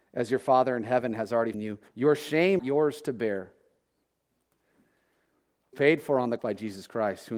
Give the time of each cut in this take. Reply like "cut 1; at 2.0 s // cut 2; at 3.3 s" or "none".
cut 1; at 1.5 s // cut 2; at 1.9 s // cut 3; at 2.6 s // cut 4; at 5.7 s // cut 5; at 6.4 s

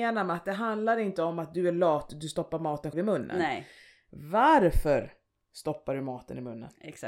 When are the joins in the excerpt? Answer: cut 1; at 2.9 s

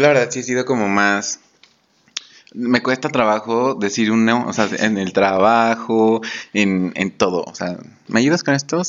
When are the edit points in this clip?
none

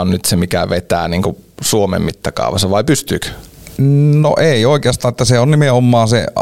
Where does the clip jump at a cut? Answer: none

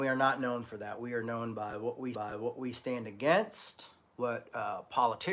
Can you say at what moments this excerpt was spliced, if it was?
cut 1; at 2.1 s // cut 2; at 4.1 s

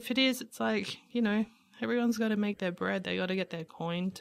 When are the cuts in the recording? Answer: none

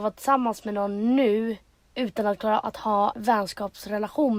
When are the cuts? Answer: cut 1; at 1.8 s // cut 2; at 2.6 s // cut 3; at 3.1 s

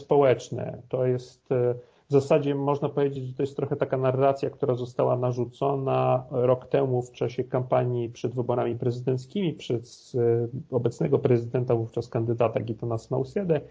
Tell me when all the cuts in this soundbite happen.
none

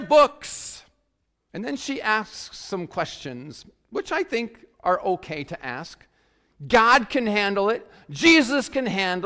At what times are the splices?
none

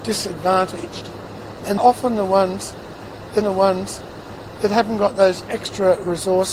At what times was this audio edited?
cut 1; at 1.8 s // cut 2; at 3.4 s

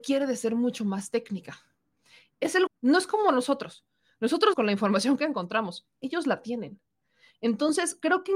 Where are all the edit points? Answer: cut 1; at 2.7 s // cut 2; at 4.5 s

